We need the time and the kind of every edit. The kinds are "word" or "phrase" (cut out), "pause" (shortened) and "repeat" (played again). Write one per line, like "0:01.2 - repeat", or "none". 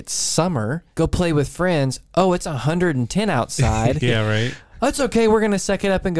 0:00.9 - pause